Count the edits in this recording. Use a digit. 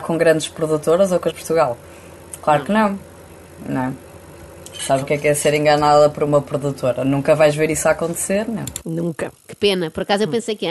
3